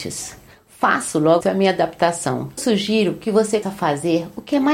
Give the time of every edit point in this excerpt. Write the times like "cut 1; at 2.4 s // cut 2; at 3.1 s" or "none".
cut 1; at 1.4 s // cut 2; at 2.6 s // cut 3; at 3.6 s